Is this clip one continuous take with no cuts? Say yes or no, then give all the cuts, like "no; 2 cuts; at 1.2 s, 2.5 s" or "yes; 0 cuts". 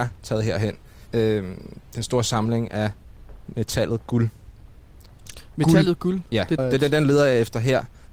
no; 2 cuts; at 1.1 s, 6.6 s